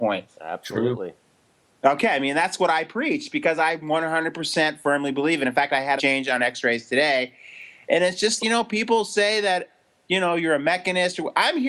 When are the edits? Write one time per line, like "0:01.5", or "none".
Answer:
0:06.0
0:08.4